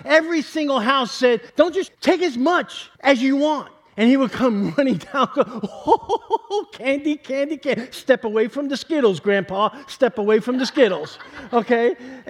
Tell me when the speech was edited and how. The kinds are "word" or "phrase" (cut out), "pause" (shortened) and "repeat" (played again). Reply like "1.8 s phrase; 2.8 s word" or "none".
1.5 s pause; 1.9 s phrase; 3.0 s pause